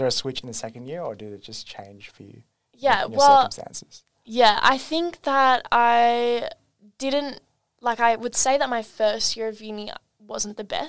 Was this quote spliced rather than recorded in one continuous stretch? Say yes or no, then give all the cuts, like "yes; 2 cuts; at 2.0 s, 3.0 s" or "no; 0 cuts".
no; 0 cuts